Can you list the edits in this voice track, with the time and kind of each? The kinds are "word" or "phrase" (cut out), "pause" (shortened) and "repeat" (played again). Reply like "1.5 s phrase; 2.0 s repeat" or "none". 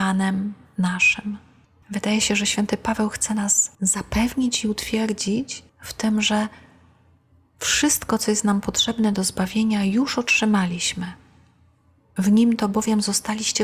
1.6 s pause; 3.7 s pause; 5.7 s pause